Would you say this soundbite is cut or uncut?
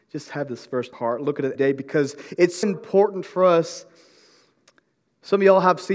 cut